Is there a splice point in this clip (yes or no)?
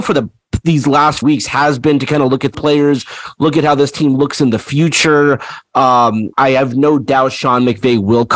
yes